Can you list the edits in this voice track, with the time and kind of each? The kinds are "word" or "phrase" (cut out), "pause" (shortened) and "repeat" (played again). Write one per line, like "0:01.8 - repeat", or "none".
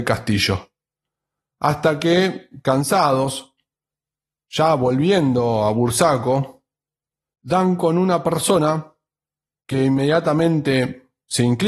none

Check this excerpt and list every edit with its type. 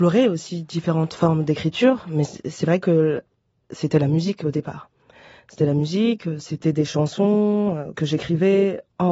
0:07.9 - word

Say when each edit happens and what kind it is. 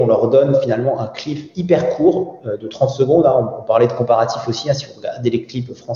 none

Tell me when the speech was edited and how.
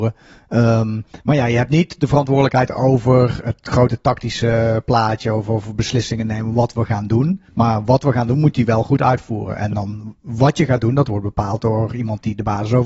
0:01.2 - pause
0:07.5 - pause

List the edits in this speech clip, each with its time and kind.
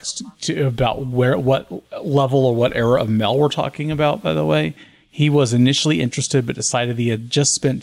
none

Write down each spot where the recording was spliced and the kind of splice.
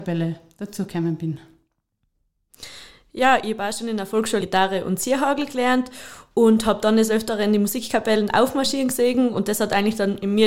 0:04.4 - word

